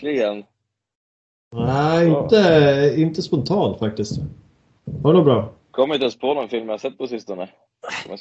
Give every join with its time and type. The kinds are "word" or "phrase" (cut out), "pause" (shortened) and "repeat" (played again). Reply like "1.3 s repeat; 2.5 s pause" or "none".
5.6 s pause